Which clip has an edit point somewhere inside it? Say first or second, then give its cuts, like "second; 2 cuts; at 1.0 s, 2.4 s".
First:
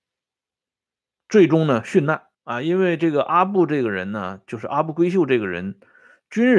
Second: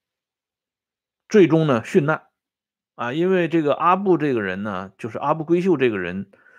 first; 1 cut; at 2.3 s